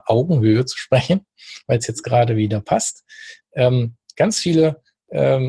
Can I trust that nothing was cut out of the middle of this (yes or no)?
yes